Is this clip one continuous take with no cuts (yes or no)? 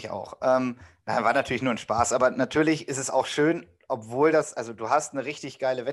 yes